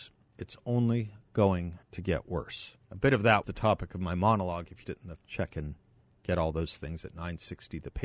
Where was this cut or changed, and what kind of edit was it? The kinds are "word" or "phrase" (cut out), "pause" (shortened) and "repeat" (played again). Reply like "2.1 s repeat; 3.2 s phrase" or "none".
1.8 s pause; 2.8 s pause; 3.4 s word; 4.8 s phrase; 5.2 s phrase